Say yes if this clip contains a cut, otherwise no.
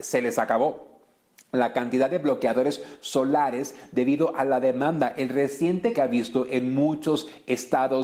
yes